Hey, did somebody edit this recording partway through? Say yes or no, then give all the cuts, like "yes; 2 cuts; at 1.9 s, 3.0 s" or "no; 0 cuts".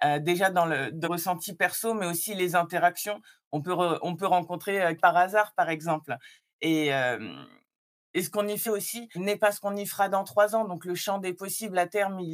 yes; 4 cuts; at 1.0 s, 5.0 s, 8.7 s, 9.1 s